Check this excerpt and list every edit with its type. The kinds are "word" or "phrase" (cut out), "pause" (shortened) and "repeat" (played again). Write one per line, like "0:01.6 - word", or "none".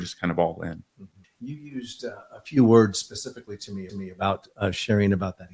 0:01.2 - pause
0:03.9 - repeat

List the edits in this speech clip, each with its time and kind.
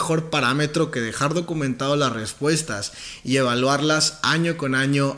none

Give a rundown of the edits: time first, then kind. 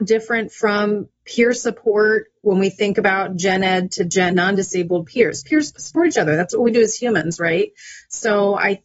0:04.3 - word

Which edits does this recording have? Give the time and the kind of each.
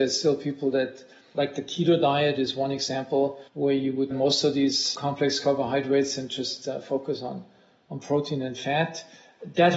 0:01.3 - phrase
0:03.5 - pause
0:04.1 - phrase

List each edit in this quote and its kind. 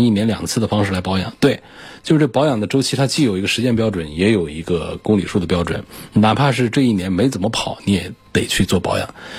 0:08.2 - pause

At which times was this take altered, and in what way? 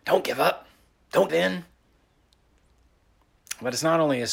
0:01.3 - word

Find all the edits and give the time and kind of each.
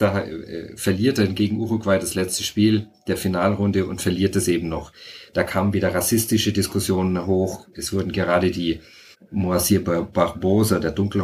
0:09.1 - pause

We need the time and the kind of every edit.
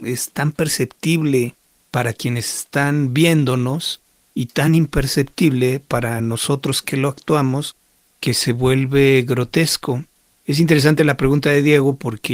none

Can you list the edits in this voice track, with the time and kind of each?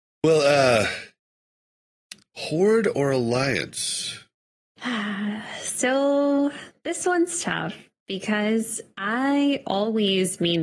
none

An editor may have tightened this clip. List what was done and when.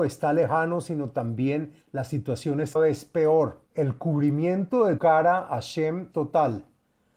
0:01.8 - pause
0:02.8 - word
0:03.7 - pause
0:05.0 - word
0:06.1 - word

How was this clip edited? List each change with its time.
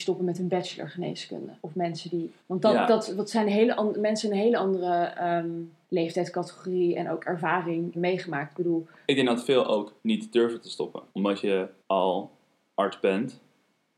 0:01.6 - pause
0:02.4 - pause
0:05.8 - pause
0:07.9 - phrase
0:09.0 - word
0:10.0 - pause
0:11.1 - pause
0:11.8 - pause

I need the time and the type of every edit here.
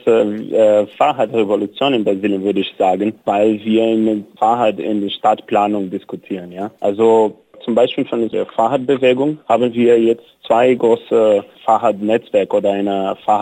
0:03.2 - pause
0:06.8 - pause
0:09.4 - pause

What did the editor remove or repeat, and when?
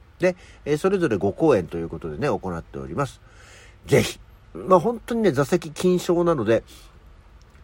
none

